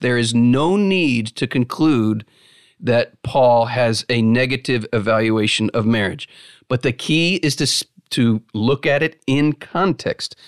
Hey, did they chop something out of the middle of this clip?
no; 0 cuts

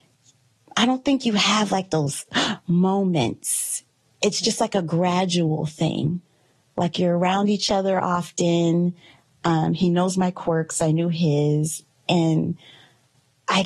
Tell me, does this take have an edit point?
no; 0 cuts

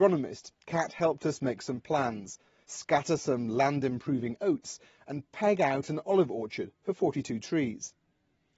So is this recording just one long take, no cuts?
yes; 0 cuts

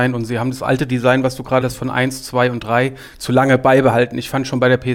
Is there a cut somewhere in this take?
yes; 1 cut; at 1.6 s

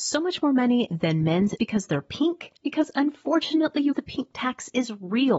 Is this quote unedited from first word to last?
no; 3 cuts; at 1.6 s, 2.6 s, 3.9 s

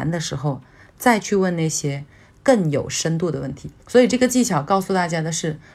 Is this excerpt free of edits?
no; 1 cut; at 3.8 s

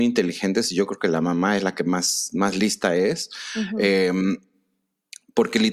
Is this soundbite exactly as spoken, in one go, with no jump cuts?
yes; 0 cuts

